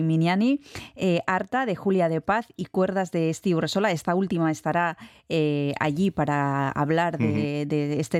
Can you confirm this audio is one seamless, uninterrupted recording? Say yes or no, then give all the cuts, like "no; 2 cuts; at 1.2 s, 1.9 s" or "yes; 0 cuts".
yes; 0 cuts